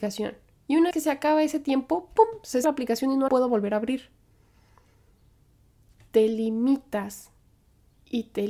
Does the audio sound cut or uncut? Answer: cut